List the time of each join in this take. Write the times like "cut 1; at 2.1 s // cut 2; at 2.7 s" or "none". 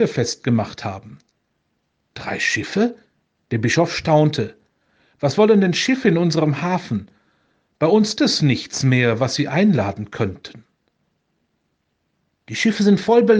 cut 1; at 8.2 s